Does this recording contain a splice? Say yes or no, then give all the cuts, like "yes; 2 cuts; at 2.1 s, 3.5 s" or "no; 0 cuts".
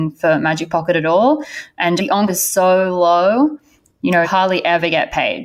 yes; 3 cuts; at 2.0 s, 2.3 s, 4.2 s